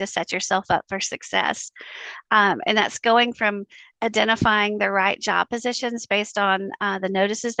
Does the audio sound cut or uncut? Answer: uncut